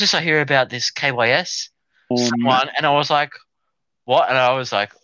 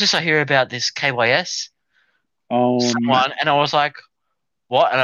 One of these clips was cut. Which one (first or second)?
first